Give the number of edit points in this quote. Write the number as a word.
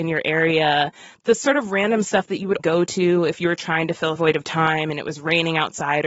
two